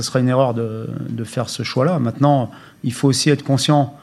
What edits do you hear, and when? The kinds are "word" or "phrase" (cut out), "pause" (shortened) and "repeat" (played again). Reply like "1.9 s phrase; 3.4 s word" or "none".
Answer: none